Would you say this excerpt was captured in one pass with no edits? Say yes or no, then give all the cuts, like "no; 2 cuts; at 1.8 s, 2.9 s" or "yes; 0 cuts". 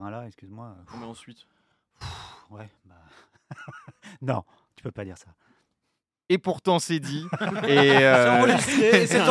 yes; 0 cuts